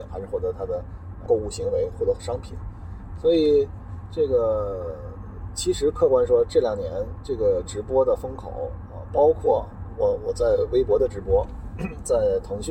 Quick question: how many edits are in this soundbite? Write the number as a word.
one